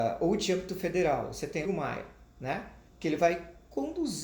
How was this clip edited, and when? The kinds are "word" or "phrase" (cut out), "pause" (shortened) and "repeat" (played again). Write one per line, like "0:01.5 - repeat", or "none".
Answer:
0:01.6 - phrase
0:02.9 - pause